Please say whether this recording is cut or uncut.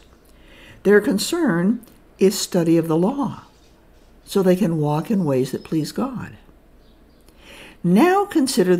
uncut